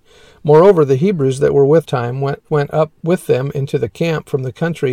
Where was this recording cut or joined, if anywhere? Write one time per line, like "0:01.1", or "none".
0:01.8
0:02.5